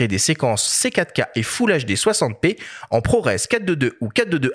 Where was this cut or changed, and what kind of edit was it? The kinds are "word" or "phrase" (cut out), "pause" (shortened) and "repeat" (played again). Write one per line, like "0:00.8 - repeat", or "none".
none